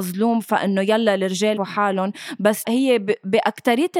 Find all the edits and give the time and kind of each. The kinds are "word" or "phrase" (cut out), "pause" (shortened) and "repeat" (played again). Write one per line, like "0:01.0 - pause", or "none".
0:01.6 - phrase
0:02.6 - word